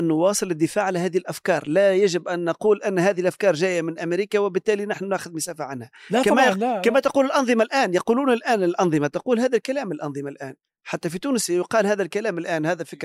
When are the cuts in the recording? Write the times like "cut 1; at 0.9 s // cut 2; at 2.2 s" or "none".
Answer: cut 1; at 10.6 s